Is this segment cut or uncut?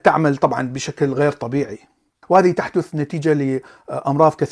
uncut